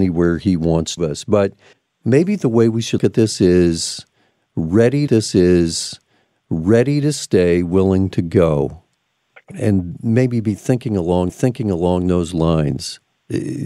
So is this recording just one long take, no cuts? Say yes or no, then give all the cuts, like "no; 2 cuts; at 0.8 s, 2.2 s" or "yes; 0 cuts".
no; 6 cuts; at 1.0 s, 1.7 s, 3.0 s, 5.1 s, 9.5 s, 11.3 s